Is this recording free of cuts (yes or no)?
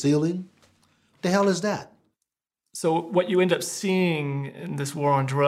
yes